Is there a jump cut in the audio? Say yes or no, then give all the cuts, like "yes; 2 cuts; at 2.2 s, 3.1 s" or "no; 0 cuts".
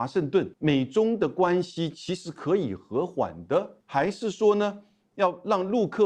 no; 0 cuts